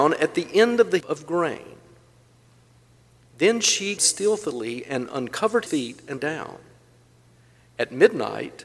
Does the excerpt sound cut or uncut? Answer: cut